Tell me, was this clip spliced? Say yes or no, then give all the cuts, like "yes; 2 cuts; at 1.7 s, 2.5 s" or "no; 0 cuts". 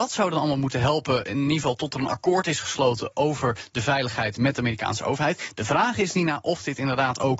no; 0 cuts